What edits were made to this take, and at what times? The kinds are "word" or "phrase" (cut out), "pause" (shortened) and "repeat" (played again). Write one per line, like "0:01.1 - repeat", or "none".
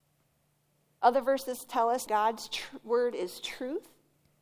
0:02.1 - word